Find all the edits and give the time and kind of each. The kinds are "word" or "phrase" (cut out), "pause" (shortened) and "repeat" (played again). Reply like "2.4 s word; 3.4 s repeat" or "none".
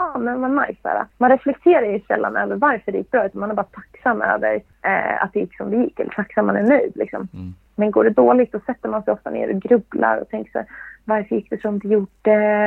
1.1 s pause